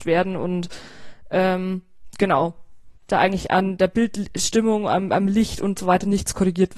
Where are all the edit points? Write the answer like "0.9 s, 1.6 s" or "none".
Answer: 3.0 s